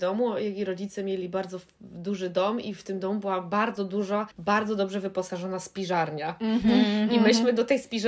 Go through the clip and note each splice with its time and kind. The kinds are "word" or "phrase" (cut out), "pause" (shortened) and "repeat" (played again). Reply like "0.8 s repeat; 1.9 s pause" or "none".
4.3 s pause